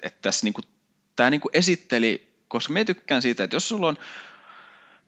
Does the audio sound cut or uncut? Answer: uncut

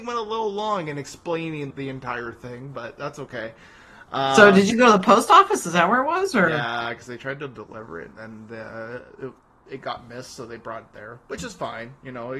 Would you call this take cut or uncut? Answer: cut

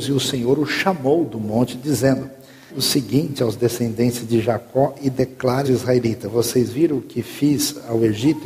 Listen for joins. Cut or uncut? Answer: cut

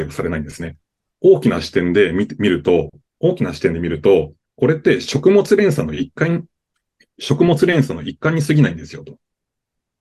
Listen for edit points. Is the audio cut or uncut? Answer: cut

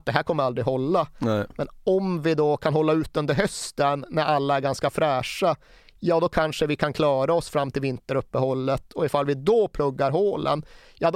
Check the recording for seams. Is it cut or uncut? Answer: uncut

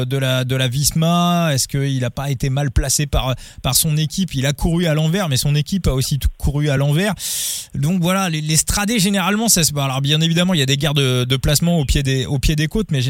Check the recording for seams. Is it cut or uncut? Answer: uncut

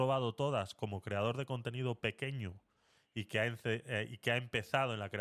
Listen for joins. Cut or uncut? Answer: uncut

